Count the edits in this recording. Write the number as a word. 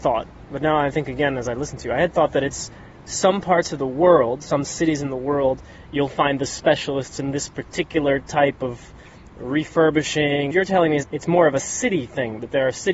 two